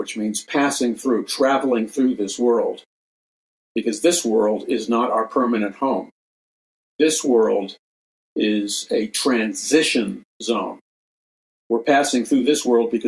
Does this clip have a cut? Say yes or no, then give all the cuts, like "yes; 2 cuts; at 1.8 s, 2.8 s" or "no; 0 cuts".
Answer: no; 0 cuts